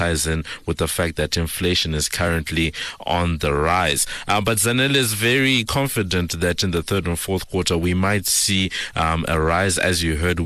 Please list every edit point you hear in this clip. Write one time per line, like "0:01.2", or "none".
none